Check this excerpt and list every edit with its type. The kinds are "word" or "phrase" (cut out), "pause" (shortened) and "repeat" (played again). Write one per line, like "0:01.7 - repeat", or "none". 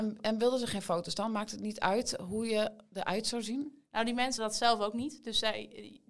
0:04.4 - word